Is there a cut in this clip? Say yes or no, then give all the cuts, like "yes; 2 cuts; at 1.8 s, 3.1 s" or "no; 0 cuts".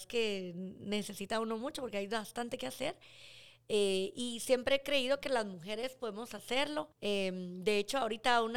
yes; 1 cut; at 6.9 s